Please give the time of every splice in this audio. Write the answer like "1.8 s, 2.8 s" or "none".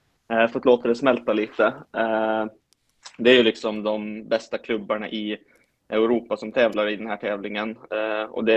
none